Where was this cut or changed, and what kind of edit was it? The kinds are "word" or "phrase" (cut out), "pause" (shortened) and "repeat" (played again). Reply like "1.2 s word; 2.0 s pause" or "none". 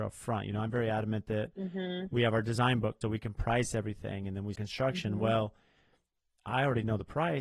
3.0 s word; 4.5 s word